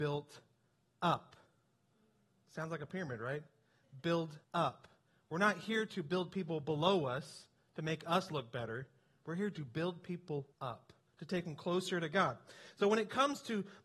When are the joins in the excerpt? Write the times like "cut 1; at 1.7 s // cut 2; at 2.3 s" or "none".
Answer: cut 1; at 4.4 s // cut 2; at 10.5 s